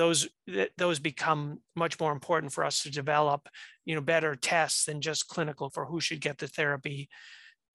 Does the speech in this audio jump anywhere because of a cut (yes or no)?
yes